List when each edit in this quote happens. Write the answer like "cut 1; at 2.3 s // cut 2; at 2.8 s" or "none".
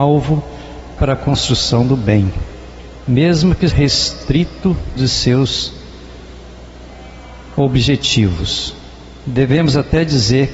cut 1; at 1.0 s // cut 2; at 3.7 s // cut 3; at 5.0 s